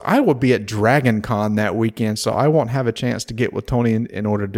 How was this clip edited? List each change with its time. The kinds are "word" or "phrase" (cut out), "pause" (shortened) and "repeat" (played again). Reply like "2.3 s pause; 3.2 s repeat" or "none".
none